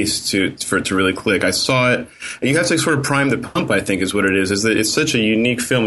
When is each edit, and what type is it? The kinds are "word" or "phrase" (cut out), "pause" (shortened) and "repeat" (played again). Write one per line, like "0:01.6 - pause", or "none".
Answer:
none